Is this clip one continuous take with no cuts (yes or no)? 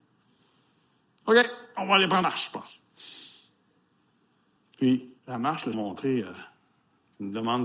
no